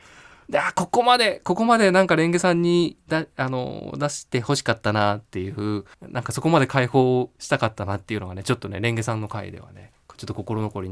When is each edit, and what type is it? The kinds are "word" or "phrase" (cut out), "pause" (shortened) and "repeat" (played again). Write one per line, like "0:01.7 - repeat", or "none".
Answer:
0:05.9 - pause